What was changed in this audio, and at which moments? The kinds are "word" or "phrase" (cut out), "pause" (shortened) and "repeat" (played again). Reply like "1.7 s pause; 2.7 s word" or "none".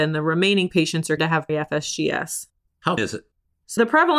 1.2 s word; 1.5 s word; 3.0 s word